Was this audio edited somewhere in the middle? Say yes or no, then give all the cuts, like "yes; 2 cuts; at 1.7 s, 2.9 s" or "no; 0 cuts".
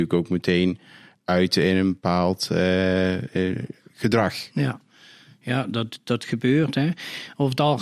no; 0 cuts